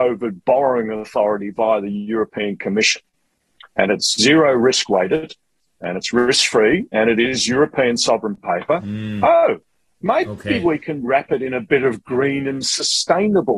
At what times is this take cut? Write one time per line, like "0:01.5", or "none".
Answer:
none